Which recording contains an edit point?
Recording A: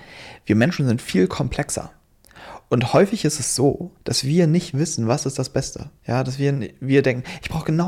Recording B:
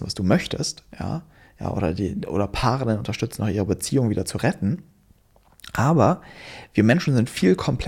A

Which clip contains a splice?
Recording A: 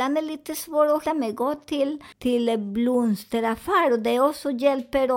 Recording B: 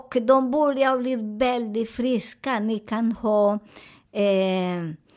A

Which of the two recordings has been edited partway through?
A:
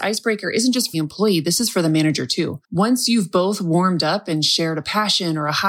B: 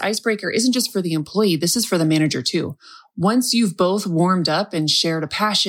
A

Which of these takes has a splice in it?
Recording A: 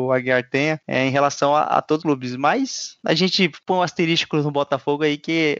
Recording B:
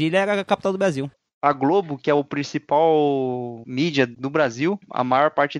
A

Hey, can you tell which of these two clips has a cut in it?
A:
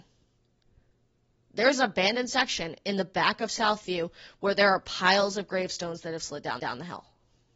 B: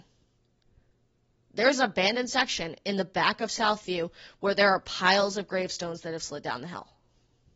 A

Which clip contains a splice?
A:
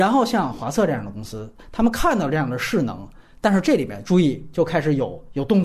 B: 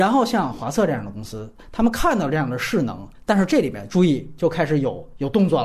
B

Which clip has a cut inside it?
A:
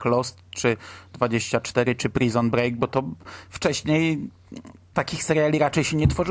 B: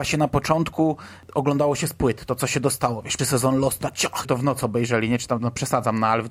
B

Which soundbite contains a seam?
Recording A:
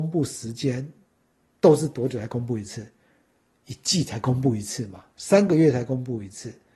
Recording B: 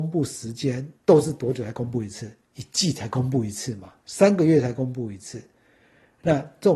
B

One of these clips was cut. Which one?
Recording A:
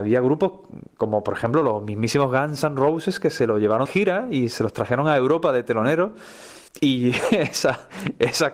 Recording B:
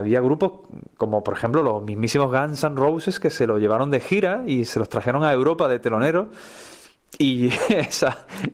A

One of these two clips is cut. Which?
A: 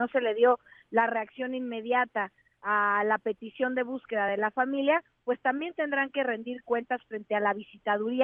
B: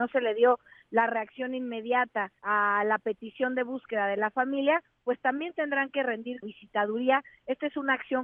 B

